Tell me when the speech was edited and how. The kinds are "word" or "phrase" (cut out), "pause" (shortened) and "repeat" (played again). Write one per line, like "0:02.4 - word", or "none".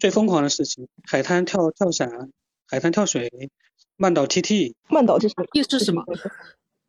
0:05.2 - word